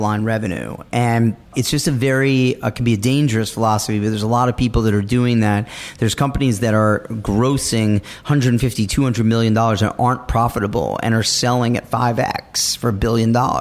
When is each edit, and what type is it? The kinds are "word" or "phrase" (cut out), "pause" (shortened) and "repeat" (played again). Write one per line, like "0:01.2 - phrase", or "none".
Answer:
0:01.5 - pause